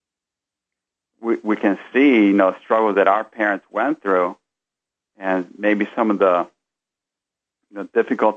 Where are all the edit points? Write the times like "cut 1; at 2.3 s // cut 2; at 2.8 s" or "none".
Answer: none